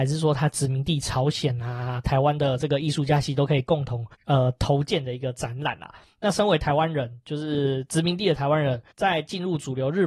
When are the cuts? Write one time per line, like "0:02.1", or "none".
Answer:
0:04.1
0:08.9